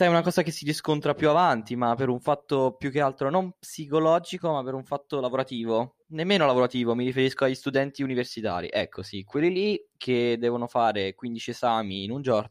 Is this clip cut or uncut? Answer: cut